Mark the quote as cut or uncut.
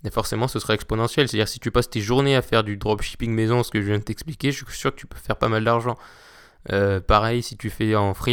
uncut